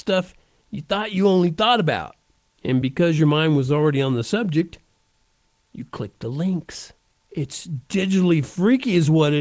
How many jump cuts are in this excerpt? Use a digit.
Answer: 0